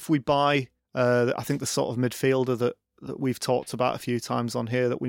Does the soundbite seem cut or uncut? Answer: uncut